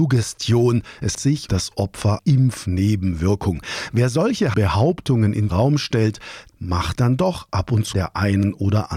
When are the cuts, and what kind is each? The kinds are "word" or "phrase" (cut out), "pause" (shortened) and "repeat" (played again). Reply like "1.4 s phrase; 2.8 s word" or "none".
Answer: 1.1 s word; 1.5 s word; 2.2 s word; 4.5 s word; 5.5 s word; 6.5 s word; 7.0 s word; 7.9 s word